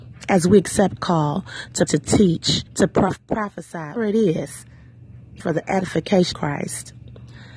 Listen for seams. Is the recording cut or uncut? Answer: cut